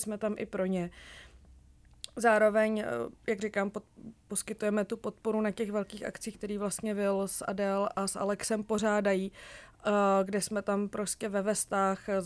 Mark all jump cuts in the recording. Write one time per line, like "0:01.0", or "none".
0:04.2

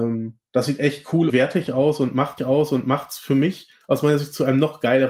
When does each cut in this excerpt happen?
0:01.3
0:02.4

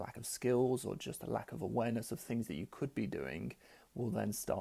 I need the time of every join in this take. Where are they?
none

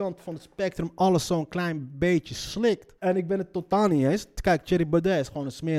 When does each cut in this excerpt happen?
0:03.0

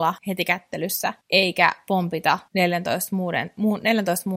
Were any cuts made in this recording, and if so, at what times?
0:02.5

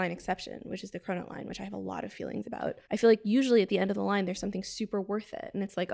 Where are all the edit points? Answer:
0:02.8

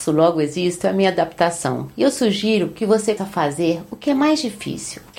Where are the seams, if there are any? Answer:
0:03.2

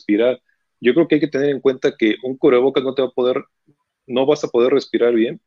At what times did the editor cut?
none

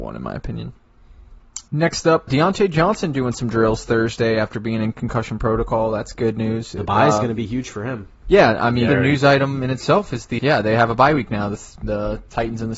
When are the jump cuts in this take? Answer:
0:01.7
0:02.3
0:08.9
0:10.4

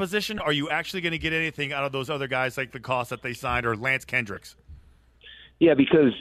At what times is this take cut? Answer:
none

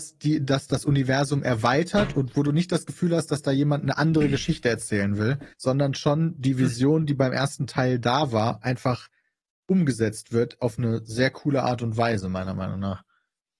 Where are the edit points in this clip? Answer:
0:05.5

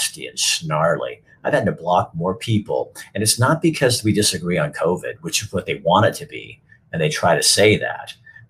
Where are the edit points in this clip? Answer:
none

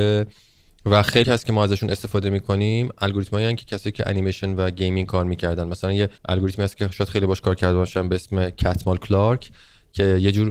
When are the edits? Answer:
0:01.2
0:06.2

